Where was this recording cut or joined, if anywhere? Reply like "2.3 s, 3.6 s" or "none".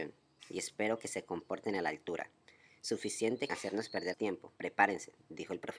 3.5 s, 4.1 s, 4.6 s